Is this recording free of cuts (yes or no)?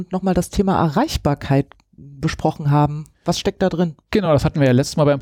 yes